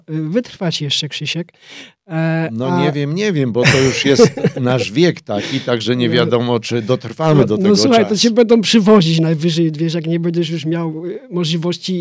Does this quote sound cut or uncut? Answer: uncut